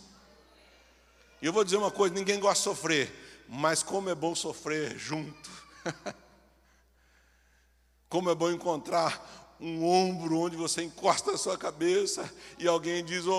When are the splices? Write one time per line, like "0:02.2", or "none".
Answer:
none

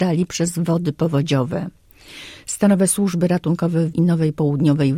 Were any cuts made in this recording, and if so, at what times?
0:03.9

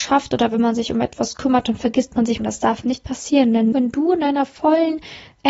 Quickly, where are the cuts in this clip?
0:02.4
0:03.7

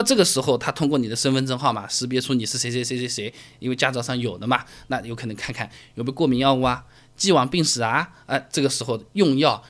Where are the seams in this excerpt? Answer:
none

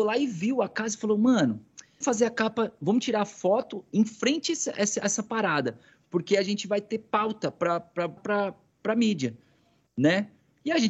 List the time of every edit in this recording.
0:02.0
0:08.2

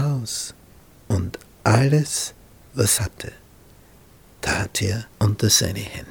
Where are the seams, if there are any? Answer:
0:03.0
0:05.1

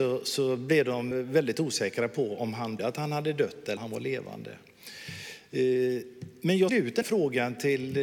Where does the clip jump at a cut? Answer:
0:01.1
0:02.8
0:03.8
0:06.7
0:07.0

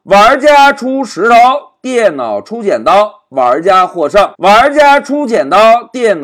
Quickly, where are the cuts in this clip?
0:04.3

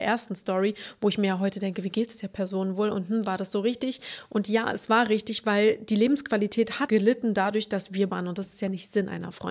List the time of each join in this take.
0:06.9
0:08.1

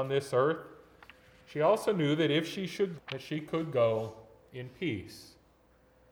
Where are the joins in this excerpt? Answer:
0:03.0

